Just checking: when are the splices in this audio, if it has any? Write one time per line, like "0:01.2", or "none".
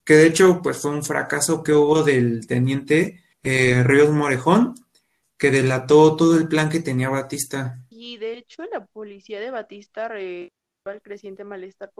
0:01.7
0:03.3
0:07.9